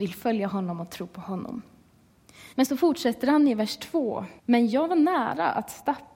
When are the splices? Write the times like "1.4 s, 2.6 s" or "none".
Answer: 2.5 s, 4.4 s